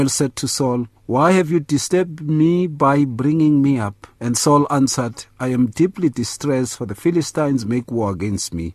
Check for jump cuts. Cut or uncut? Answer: cut